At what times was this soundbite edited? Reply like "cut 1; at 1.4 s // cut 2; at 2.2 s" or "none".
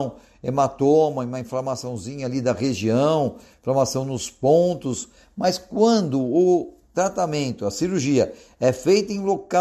none